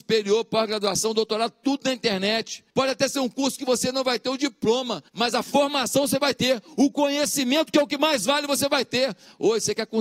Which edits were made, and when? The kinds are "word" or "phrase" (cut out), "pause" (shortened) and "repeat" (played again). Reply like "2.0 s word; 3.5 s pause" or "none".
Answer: 2.7 s pause; 5.1 s pause